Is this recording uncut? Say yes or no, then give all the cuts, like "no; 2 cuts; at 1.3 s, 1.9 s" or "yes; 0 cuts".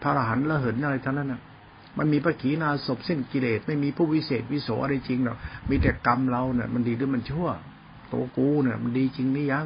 yes; 0 cuts